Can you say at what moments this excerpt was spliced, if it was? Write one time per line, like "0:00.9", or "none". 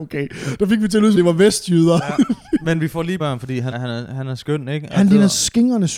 0:01.1
0:03.2
0:03.7

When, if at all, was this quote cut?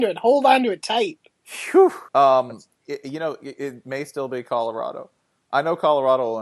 0:02.1

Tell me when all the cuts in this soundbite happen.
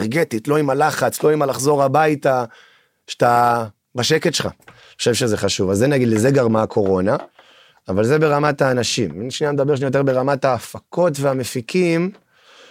none

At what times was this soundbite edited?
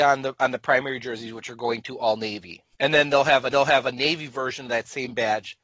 0:02.7
0:03.5

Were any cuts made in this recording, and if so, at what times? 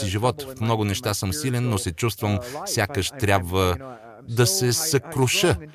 none

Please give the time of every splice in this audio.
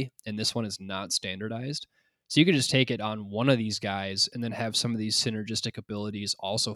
none

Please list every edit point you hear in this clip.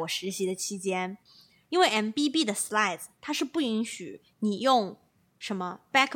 none

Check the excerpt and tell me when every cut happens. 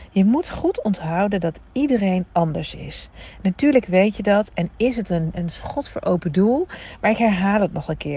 0:05.3

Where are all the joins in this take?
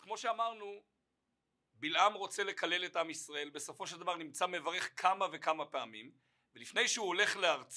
none

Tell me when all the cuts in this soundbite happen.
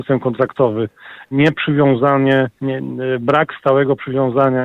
0:01.3
0:02.6

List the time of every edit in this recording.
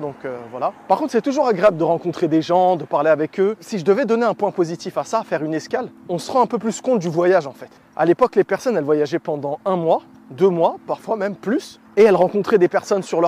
none

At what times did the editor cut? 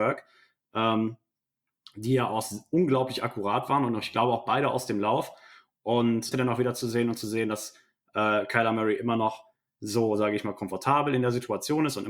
0:06.3

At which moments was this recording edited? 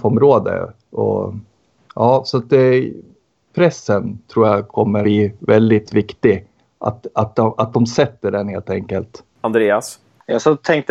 0:05.0

